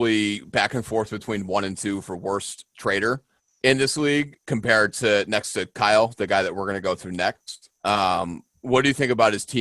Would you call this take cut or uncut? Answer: cut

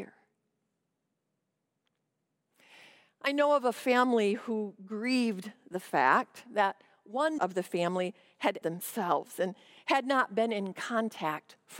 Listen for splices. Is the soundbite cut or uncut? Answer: cut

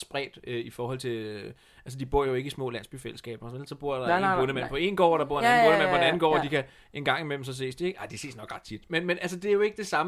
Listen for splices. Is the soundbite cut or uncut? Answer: uncut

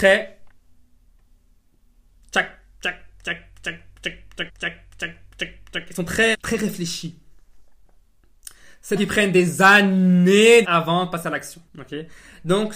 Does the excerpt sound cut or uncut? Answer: cut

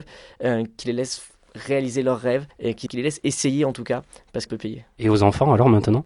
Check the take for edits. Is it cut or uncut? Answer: cut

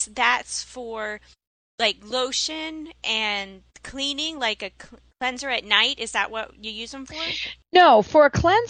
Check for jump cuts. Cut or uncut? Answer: uncut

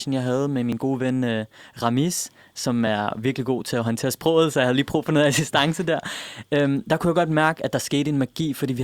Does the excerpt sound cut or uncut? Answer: uncut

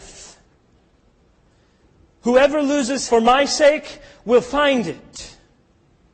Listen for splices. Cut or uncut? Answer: cut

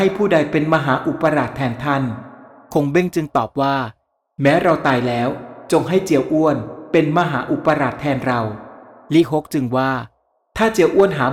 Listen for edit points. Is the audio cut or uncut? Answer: uncut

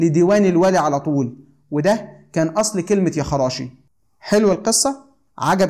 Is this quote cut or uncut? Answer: uncut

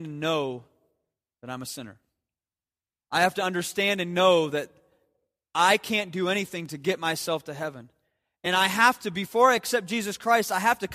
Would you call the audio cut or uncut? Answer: uncut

